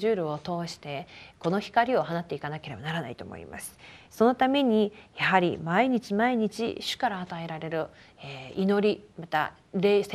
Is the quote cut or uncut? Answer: uncut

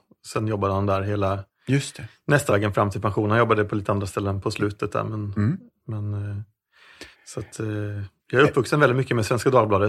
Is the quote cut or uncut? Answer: cut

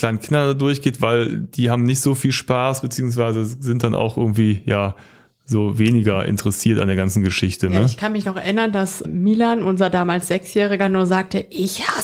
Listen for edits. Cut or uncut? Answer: cut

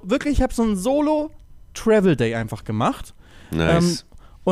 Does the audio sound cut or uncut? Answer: uncut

